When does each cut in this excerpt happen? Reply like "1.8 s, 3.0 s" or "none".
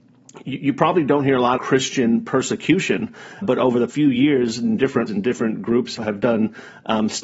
1.6 s, 3.4 s, 3.9 s, 5.1 s, 6.0 s